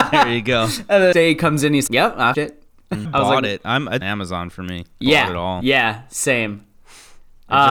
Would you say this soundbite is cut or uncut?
cut